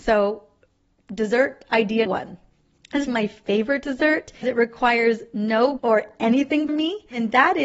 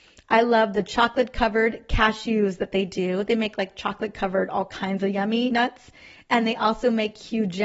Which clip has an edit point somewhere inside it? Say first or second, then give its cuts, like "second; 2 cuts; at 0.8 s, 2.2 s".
first; 5 cuts; at 2.1 s, 3.1 s, 4.4 s, 5.8 s, 6.7 s